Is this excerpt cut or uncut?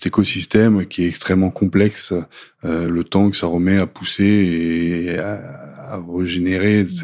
uncut